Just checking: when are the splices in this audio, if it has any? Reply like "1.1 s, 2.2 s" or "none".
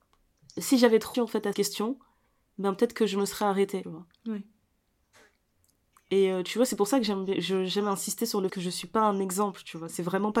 1.1 s, 1.5 s, 3.8 s, 8.5 s